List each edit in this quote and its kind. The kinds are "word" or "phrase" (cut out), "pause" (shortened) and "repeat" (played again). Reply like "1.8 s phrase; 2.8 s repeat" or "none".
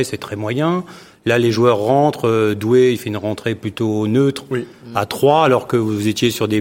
none